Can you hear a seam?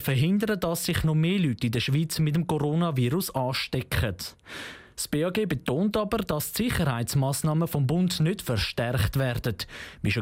no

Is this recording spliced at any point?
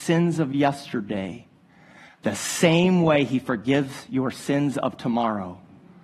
no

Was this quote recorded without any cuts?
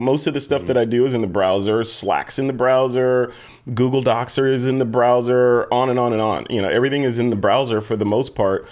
yes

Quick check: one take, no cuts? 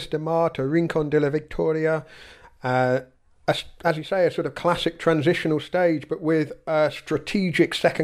yes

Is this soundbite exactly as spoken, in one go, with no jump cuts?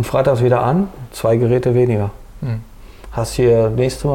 yes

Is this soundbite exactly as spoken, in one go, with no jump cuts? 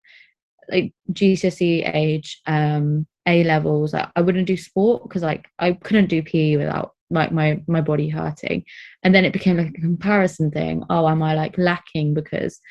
no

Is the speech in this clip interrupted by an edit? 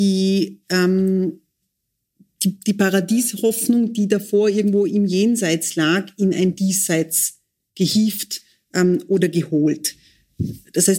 no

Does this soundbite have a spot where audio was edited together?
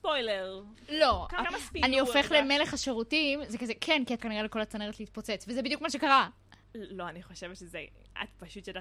yes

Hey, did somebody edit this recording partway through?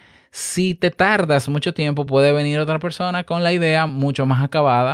no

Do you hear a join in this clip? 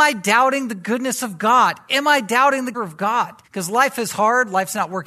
yes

